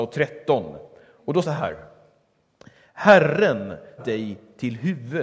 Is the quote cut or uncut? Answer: cut